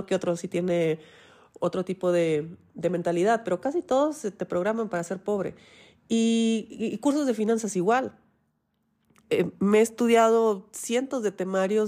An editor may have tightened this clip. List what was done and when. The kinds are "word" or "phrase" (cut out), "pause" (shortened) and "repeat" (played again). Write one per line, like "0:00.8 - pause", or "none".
none